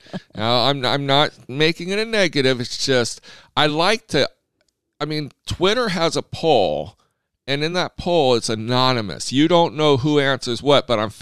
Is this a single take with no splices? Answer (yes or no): yes